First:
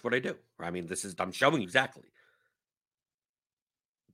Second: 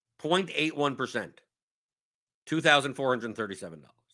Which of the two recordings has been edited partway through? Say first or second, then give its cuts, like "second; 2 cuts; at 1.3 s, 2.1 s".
first; 2 cuts; at 1.1 s, 1.6 s